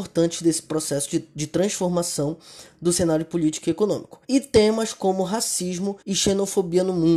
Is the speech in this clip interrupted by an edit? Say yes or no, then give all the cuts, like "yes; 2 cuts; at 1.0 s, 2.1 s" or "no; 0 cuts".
yes; 2 cuts; at 4.2 s, 6.0 s